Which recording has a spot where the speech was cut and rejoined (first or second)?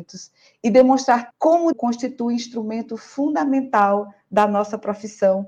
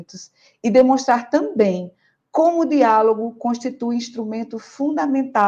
first